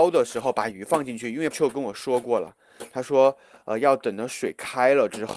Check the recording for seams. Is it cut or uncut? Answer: cut